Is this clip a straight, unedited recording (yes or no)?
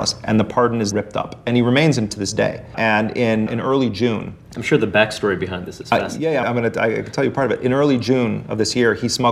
no